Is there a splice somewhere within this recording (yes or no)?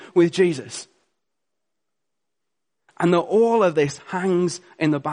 no